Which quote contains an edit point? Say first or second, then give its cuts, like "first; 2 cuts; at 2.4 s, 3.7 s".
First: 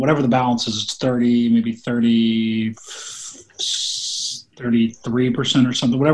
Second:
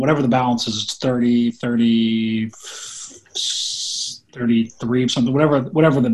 second; 2 cuts; at 1.5 s, 5.1 s